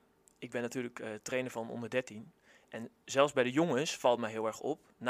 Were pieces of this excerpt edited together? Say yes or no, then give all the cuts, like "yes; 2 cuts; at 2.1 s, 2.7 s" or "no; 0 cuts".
no; 0 cuts